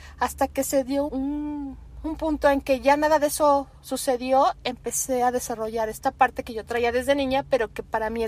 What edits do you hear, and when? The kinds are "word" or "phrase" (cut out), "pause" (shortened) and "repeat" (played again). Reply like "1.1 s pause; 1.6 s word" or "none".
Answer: 1.1 s word; 4.6 s word